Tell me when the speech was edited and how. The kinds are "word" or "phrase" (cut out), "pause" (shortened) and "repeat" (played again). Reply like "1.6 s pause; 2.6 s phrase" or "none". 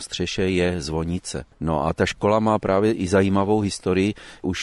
1.5 s pause